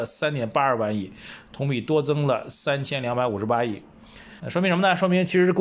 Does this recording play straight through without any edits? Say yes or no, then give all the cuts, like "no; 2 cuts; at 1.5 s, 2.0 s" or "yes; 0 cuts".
no; 1 cut; at 4.4 s